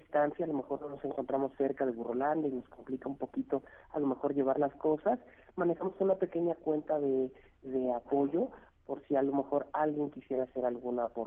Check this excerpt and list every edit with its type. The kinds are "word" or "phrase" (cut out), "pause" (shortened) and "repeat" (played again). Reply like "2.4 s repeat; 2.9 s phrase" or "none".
none